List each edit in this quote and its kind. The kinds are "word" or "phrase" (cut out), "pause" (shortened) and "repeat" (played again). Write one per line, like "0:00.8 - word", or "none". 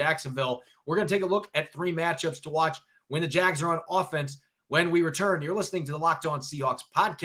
none